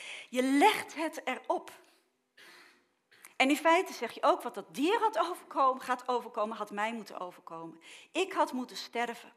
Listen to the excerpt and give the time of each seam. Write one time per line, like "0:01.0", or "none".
none